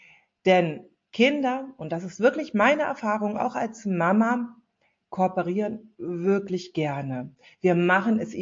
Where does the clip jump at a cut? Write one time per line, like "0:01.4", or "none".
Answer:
none